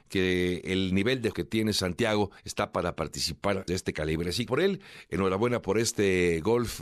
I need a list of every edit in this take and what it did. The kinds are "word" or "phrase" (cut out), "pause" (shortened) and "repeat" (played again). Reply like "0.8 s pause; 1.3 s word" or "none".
1.3 s word; 2.4 s pause; 3.7 s phrase; 4.5 s phrase